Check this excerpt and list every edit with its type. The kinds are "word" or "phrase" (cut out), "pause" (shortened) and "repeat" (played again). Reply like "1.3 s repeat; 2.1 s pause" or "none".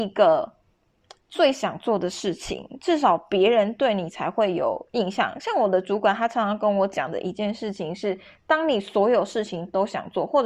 none